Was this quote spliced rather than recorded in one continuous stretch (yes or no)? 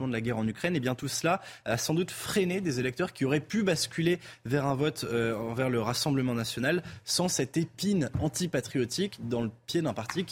no